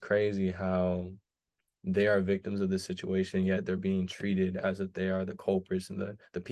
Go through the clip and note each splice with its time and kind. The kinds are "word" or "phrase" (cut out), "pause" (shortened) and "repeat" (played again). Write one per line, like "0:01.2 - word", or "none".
none